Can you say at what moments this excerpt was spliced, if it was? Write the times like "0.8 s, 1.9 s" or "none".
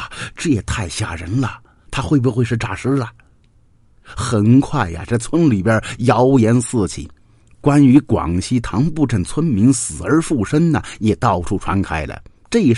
none